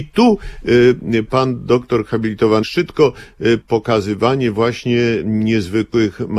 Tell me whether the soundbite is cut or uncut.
cut